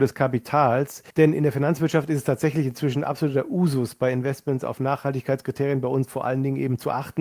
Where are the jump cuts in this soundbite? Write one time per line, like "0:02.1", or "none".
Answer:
0:01.1